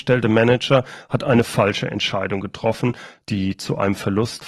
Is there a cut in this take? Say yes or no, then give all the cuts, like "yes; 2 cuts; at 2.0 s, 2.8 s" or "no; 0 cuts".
no; 0 cuts